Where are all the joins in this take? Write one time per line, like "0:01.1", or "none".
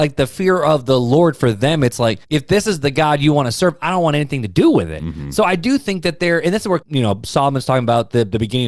0:02.2
0:06.8